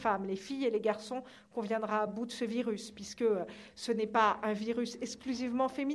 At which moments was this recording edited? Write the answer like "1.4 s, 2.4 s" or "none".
none